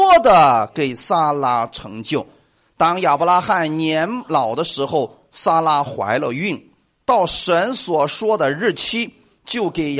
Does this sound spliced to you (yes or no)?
no